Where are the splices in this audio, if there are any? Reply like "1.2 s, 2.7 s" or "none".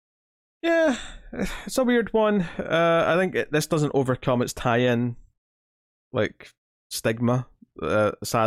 none